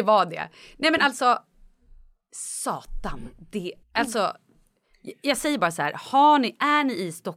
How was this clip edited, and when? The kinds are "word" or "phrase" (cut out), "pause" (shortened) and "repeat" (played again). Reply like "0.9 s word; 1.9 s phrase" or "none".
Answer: 3.8 s pause